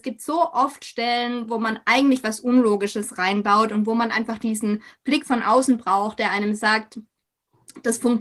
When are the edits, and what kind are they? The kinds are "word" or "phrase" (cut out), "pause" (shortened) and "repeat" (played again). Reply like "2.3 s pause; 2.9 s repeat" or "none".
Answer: none